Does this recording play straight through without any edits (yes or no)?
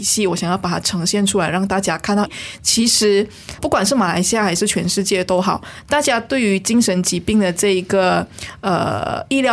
no